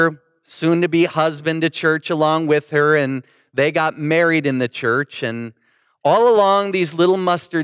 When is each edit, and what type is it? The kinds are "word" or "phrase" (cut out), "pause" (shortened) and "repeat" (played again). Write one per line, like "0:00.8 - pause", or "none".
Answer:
none